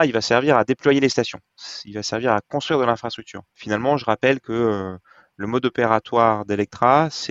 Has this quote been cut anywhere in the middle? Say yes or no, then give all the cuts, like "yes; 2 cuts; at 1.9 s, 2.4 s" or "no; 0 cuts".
no; 0 cuts